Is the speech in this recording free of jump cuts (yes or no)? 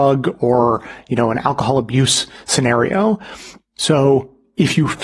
yes